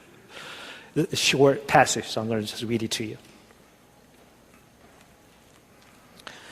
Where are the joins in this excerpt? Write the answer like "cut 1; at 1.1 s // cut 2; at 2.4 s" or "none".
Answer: none